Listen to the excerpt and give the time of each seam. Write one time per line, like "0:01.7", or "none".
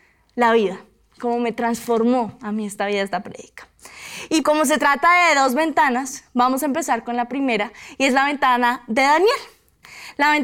0:04.4

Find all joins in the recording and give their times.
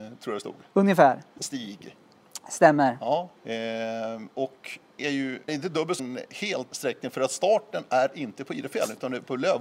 0:01.4
0:03.4
0:05.0
0:05.5
0:06.0
0:06.7

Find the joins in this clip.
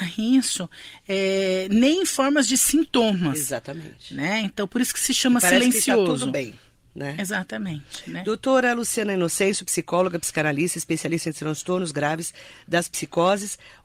none

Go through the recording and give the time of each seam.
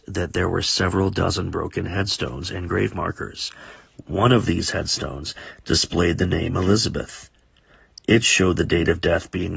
none

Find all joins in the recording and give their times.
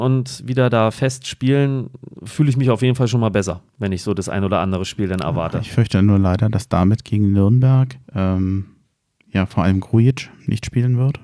0:02.2
0:03.7
0:08.0

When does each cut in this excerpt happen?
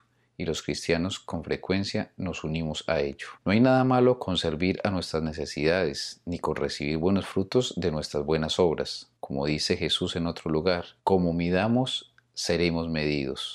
0:03.4
0:09.2
0:11.0

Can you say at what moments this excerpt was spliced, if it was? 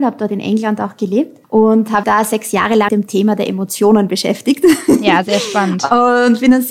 0:01.4
0:02.0
0:02.9

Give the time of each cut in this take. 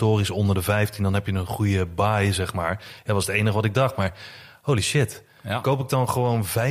none

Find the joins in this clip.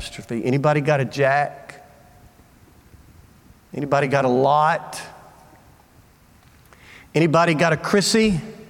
none

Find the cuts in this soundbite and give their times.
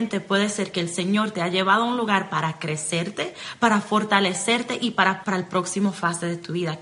0:05.2

